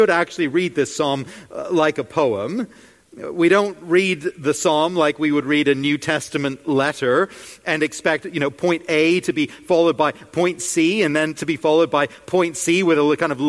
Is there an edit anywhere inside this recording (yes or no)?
no